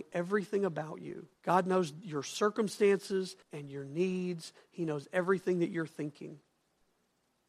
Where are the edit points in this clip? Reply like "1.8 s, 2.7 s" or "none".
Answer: 1.4 s, 3.4 s